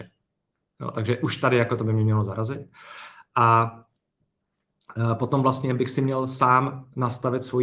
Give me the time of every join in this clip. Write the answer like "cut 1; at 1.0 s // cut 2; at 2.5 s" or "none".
none